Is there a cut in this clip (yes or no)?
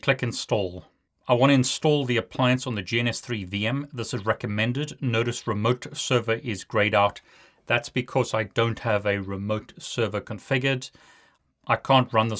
no